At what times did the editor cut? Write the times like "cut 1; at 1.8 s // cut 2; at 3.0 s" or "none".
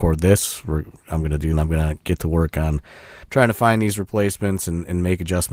cut 1; at 1.5 s // cut 2; at 3.2 s